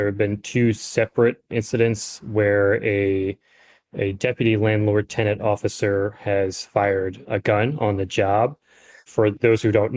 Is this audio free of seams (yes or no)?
yes